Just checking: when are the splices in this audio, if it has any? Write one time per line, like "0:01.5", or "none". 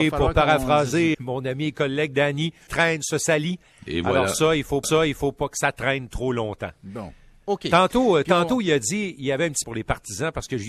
0:01.1
0:02.7
0:04.8
0:09.6